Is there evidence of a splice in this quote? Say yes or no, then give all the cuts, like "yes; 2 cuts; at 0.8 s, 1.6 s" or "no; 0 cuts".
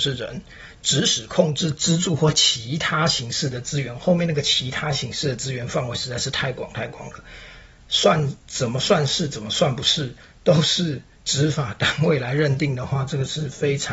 no; 0 cuts